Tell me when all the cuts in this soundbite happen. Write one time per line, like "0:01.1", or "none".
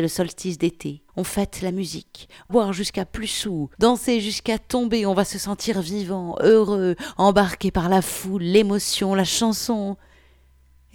0:01.1
0:02.5
0:03.7